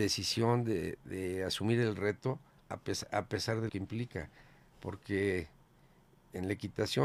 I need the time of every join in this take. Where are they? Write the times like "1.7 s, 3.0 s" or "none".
1.0 s, 2.6 s, 3.7 s

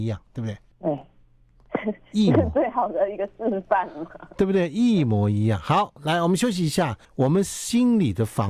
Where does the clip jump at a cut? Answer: 7.0 s

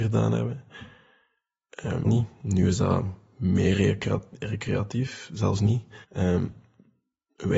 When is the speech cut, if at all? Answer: 2.0 s, 6.0 s

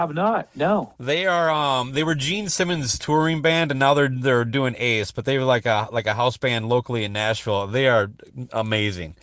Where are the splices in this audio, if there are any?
none

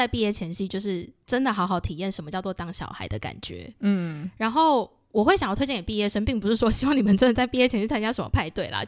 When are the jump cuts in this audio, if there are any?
none

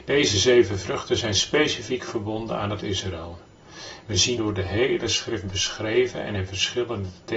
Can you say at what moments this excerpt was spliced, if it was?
2.8 s, 4.4 s

